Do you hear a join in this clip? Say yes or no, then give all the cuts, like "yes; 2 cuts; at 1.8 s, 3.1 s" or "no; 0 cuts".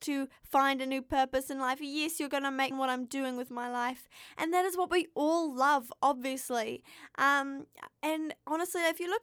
yes; 1 cut; at 2.7 s